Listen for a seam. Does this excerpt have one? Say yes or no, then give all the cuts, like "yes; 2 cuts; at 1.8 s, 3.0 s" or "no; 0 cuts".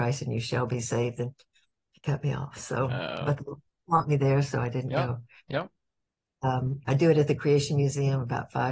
no; 0 cuts